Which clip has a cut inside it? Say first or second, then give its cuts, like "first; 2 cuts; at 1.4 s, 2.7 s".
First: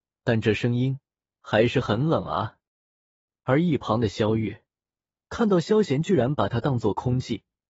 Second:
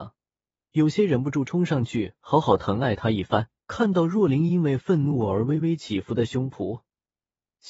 second; 1 cut; at 3.6 s